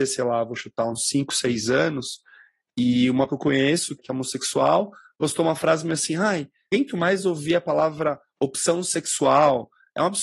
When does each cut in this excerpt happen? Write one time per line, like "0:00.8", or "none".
0:03.3
0:04.0
0:06.7

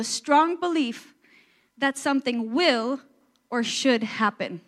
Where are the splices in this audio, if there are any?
none

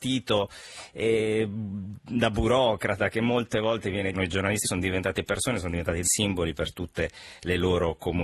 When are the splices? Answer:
0:04.1
0:04.6
0:06.0

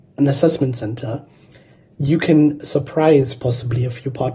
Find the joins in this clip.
none

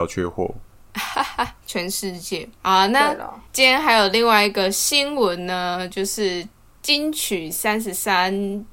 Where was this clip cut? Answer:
0:01.6
0:02.6
0:03.5

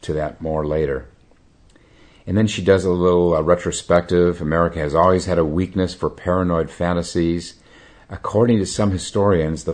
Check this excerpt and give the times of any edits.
none

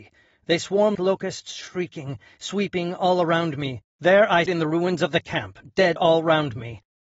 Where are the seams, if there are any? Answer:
0:00.9
0:03.9
0:04.5
0:06.0

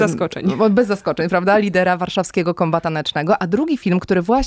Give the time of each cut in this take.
none

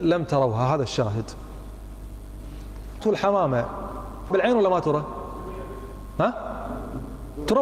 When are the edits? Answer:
0:03.0
0:04.3

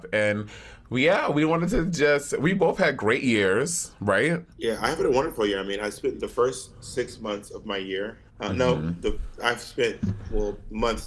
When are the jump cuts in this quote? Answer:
0:04.5
0:08.3

